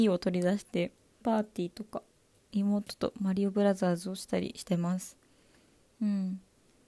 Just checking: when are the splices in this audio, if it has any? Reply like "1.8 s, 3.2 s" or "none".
1.2 s